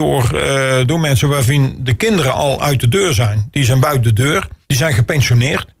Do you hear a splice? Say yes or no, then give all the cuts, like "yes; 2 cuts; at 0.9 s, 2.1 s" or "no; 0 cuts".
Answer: yes; 1 cut; at 4.6 s